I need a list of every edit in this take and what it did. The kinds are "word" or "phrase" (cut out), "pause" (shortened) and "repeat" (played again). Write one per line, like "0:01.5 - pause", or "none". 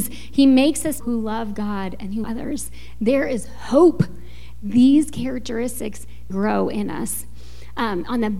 0:01.0 - word
0:02.2 - word
0:06.3 - word